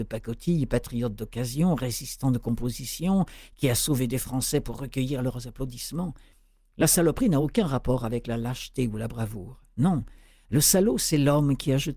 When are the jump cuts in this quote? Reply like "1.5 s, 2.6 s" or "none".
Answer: none